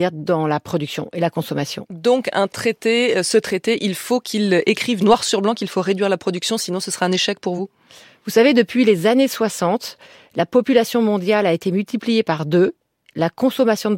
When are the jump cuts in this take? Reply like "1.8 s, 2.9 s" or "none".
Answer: none